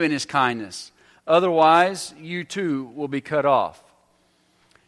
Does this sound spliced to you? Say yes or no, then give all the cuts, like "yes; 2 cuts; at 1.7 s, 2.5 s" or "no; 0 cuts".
no; 0 cuts